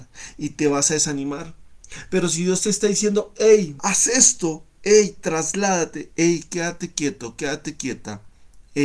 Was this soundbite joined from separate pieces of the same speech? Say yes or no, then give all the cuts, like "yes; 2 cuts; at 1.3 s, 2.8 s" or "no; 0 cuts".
yes; 1 cut; at 3.8 s